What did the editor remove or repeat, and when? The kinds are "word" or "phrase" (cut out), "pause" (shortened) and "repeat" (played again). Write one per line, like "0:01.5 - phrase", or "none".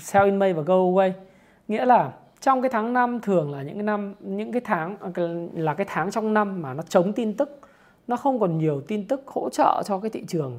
none